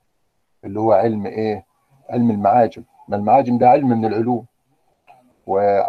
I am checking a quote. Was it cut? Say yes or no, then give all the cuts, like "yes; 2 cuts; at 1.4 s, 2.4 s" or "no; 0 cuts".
no; 0 cuts